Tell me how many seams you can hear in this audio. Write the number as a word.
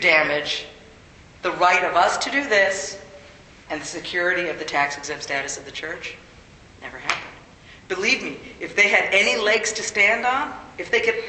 zero